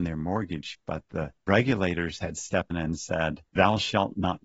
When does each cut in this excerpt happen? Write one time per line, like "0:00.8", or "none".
0:01.4
0:02.7
0:03.5